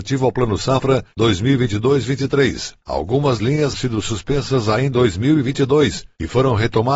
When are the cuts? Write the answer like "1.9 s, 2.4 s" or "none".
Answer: 3.4 s, 3.7 s, 4.9 s